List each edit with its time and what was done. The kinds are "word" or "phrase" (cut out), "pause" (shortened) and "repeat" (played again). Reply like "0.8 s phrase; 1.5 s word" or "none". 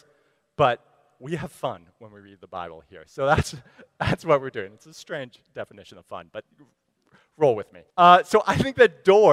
7.9 s pause